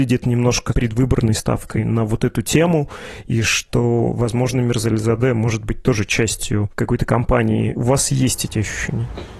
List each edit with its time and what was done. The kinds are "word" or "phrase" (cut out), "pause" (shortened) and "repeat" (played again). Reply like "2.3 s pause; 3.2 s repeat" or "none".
none